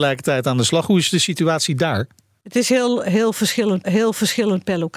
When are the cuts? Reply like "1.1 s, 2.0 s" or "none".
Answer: 3.8 s